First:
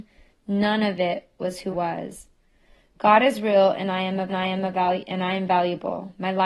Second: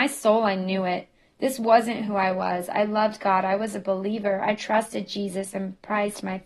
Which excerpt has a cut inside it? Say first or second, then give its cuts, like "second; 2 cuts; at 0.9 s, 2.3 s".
first; 2 cuts; at 1.7 s, 4.3 s